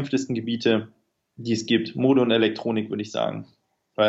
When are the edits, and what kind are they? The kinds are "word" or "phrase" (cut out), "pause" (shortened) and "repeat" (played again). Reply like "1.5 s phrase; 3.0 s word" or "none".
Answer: none